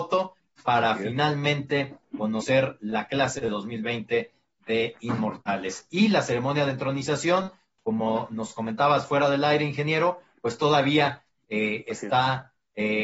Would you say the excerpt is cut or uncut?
uncut